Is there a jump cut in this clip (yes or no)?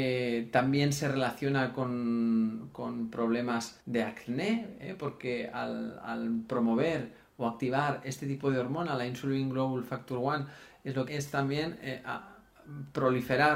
yes